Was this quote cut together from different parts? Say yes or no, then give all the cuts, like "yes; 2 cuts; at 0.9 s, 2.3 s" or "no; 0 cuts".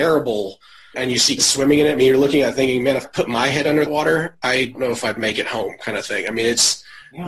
yes; 5 cuts; at 0.9 s, 1.4 s, 3.0 s, 3.9 s, 4.7 s